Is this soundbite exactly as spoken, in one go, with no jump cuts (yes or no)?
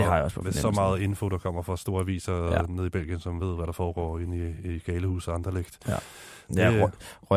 yes